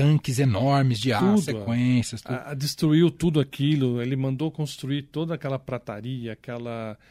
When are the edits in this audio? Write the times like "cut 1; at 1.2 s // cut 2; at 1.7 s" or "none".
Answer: cut 1; at 1.2 s